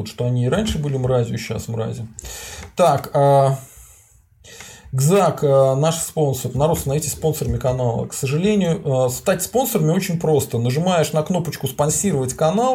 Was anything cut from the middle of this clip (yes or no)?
no